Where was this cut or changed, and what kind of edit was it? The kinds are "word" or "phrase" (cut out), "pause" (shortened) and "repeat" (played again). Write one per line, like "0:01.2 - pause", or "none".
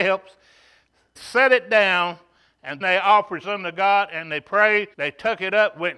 0:01.2 - word
0:02.8 - word
0:03.4 - word
0:04.9 - pause